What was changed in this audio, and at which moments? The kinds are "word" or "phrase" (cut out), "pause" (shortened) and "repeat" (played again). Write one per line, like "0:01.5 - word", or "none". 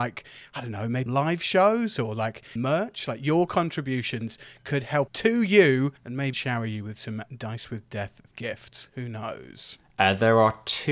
0:01.1 - word
0:02.6 - word
0:05.1 - phrase
0:06.0 - pause
0:06.3 - word
0:08.3 - word